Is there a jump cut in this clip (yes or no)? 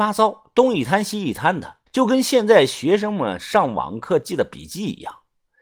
yes